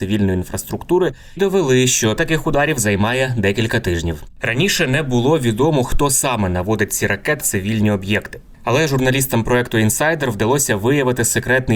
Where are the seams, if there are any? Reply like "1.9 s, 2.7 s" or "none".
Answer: 1.4 s, 2.2 s, 7.4 s